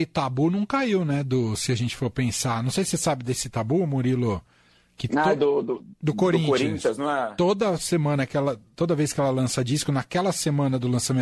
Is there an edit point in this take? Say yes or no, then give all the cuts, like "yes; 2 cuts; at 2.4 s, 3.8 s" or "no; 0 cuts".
no; 0 cuts